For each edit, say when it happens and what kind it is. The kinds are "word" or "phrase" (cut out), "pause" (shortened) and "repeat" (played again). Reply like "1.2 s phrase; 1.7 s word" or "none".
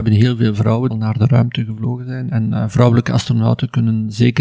0.9 s word

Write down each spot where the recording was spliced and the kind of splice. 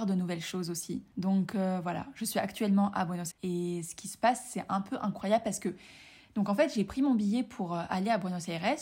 3.3 s word

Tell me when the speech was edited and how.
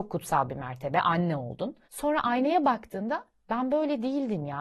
1.8 s pause

